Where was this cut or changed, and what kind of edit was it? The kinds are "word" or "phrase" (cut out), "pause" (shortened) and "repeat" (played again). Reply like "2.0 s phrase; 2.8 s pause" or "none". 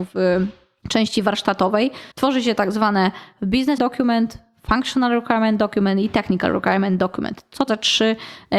2.1 s pause; 3.8 s word; 7.7 s word